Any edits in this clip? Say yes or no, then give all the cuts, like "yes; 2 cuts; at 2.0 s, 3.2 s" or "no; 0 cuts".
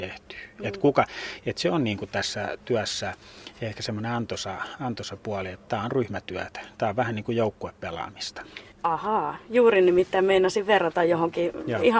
yes; 1 cut; at 8.7 s